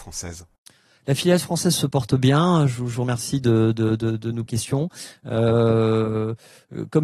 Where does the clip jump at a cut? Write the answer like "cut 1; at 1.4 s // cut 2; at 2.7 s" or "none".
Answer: cut 1; at 4.5 s